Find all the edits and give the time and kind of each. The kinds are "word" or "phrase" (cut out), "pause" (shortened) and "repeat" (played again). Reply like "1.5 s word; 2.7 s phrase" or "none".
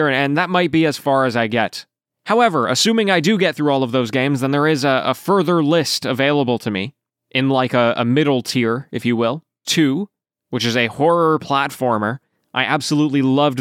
9.6 s phrase